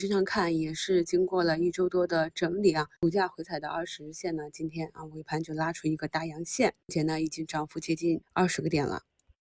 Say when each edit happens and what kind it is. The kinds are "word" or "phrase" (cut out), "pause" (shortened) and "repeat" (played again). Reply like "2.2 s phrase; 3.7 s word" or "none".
3.0 s pause; 6.8 s pause; 8.2 s pause